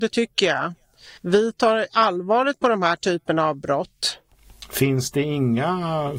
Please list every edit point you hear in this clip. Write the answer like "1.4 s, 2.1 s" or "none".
1.2 s